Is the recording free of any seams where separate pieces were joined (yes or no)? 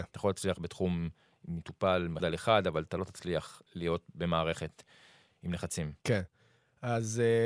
no